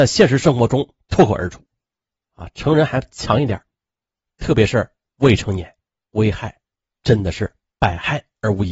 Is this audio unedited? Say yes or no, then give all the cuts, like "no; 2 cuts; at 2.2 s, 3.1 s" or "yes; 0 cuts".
yes; 0 cuts